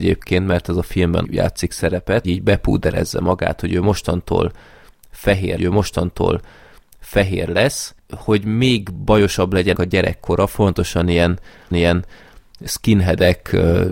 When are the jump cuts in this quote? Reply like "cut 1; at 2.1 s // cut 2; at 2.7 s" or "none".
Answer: cut 1; at 1.2 s // cut 2; at 2.2 s // cut 3; at 5.6 s // cut 4; at 9.7 s // cut 5; at 11.7 s